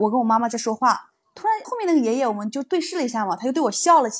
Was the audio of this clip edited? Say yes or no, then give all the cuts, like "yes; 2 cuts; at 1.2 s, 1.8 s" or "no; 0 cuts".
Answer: yes; 1 cut; at 1.6 s